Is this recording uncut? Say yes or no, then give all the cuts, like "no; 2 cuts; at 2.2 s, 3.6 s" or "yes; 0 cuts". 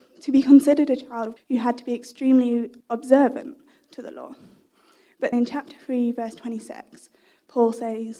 no; 3 cuts; at 1.4 s, 2.8 s, 5.3 s